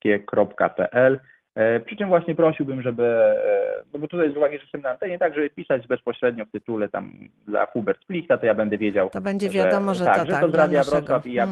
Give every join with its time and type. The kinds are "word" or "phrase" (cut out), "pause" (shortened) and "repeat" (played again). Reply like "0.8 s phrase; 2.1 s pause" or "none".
3.9 s pause